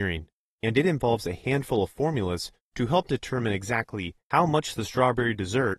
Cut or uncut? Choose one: uncut